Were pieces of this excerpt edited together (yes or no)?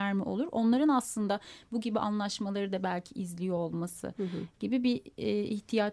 no